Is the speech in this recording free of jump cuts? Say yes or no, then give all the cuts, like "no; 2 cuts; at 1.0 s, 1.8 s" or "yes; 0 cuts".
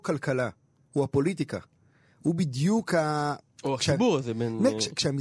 yes; 0 cuts